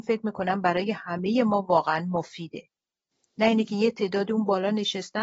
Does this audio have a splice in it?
no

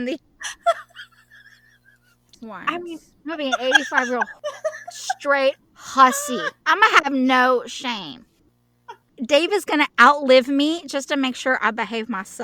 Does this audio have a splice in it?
yes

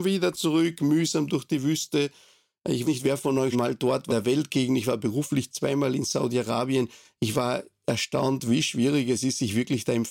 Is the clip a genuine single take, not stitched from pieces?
no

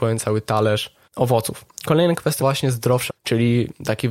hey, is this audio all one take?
no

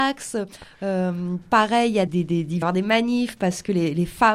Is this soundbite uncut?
no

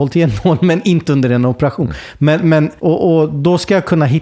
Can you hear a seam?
yes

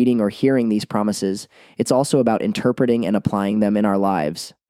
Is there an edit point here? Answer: no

